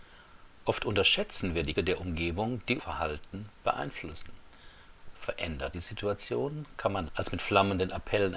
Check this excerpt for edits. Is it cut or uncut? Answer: cut